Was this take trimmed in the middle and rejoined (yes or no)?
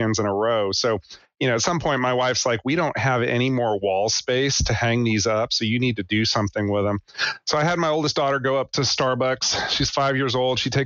no